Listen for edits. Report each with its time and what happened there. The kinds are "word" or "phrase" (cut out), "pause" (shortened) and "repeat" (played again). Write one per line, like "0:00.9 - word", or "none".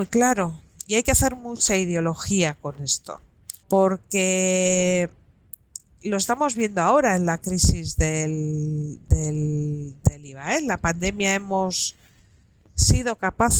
0:03.6 - pause